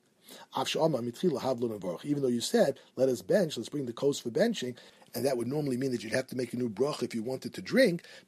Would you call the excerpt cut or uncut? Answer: uncut